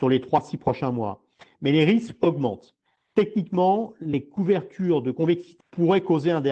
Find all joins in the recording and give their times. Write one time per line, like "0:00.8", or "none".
0:05.6